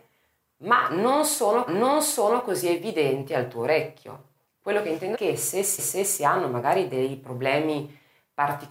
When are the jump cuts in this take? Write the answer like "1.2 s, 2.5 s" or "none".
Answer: 1.7 s, 4.5 s, 5.1 s, 5.8 s